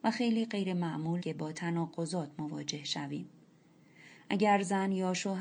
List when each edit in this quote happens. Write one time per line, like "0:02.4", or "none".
0:01.2